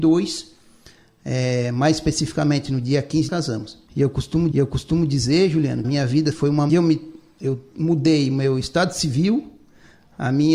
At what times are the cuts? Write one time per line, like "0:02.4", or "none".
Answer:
0:03.3
0:03.9
0:04.5
0:05.8
0:06.3
0:06.7